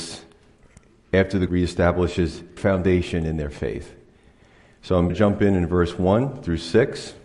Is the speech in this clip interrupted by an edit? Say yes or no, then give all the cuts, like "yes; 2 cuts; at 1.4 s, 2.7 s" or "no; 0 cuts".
yes; 3 cuts; at 1.5 s, 2.6 s, 5.1 s